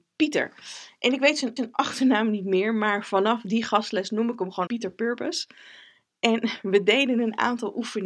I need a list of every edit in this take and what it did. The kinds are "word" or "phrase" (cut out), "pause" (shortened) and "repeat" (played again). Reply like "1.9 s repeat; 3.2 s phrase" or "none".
1.6 s repeat; 4.7 s word